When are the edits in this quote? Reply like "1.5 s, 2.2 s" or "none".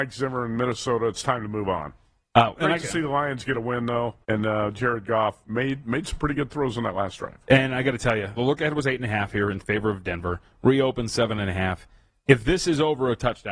2.5 s, 4.2 s, 8.4 s